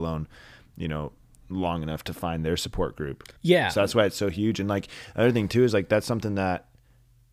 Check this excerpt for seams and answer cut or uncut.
cut